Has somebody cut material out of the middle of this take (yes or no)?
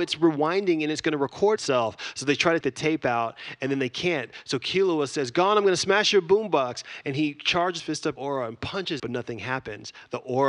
yes